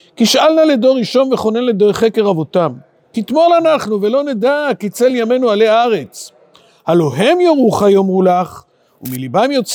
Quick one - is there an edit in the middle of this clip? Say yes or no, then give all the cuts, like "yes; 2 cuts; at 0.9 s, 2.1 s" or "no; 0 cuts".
no; 0 cuts